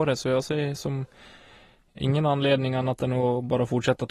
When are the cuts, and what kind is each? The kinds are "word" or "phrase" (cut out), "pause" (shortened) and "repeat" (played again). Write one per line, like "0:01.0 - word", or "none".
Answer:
none

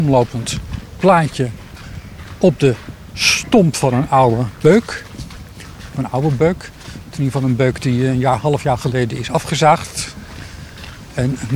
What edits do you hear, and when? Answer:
none

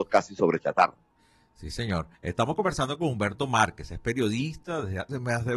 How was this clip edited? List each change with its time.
0:02.1 - pause

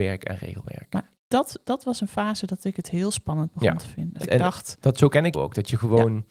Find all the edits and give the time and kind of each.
0:01.2 - pause
0:04.2 - word
0:05.3 - word

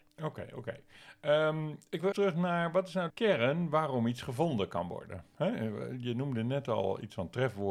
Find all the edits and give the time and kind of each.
0:02.1 - word
0:03.1 - word

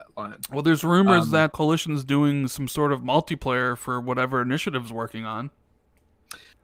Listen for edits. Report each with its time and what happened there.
0:01.5 - word

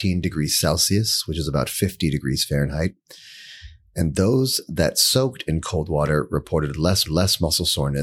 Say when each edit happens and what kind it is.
0:07.1 - repeat

